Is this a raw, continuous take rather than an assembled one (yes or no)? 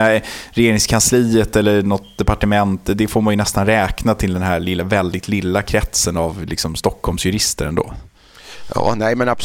yes